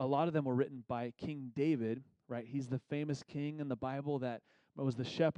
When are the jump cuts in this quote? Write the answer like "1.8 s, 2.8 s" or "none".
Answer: none